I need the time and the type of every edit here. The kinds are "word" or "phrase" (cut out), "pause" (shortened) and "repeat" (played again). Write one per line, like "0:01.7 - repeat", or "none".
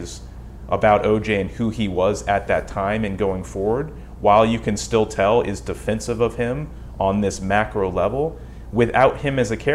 none